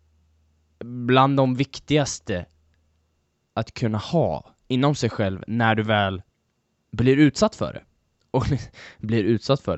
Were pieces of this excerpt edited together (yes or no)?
no